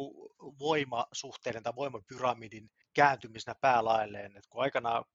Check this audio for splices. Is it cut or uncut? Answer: cut